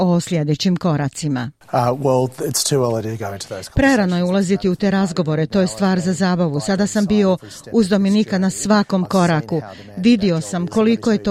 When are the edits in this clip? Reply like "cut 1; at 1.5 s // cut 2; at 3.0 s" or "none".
none